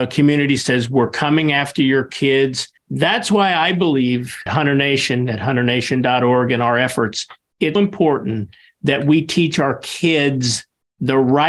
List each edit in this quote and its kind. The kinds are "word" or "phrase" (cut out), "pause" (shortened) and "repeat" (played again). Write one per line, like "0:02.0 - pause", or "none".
0:02.8 - pause
0:04.5 - word
0:07.8 - word